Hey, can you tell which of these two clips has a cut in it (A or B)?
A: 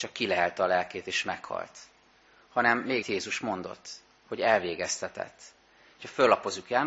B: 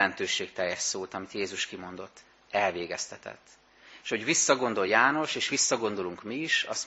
A